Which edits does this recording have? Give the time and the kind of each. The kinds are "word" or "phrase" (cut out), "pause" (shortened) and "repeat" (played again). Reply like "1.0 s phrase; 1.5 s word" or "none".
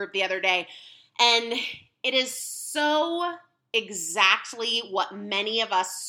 none